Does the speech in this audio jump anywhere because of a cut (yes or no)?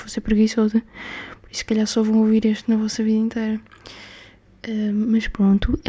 no